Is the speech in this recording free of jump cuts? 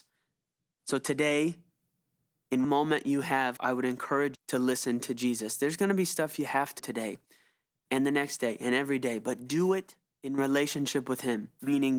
no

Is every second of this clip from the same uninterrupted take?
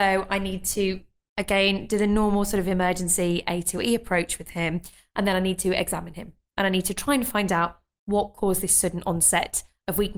yes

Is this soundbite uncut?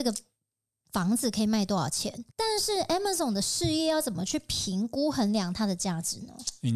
no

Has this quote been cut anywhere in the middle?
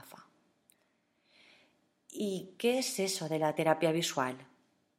no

